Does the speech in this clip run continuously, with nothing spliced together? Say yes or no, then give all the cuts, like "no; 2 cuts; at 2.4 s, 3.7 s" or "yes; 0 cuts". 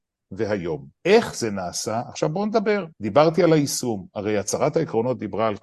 no; 2 cuts; at 0.9 s, 2.9 s